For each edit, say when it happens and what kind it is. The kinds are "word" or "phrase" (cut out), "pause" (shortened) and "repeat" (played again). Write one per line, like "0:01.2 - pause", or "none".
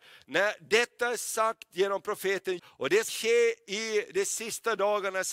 0:02.6 - word
0:03.1 - word